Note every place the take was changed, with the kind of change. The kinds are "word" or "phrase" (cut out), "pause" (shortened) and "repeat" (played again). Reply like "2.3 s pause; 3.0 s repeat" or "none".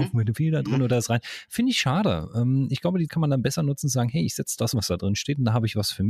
3.1 s word; 4.7 s word